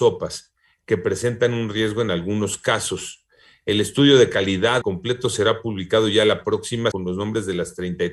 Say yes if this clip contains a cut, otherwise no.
yes